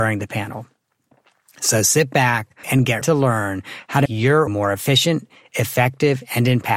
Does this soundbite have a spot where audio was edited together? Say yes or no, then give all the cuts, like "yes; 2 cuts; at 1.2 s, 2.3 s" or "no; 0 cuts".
yes; 4 cuts; at 2.6 s, 3.0 s, 4.1 s, 4.5 s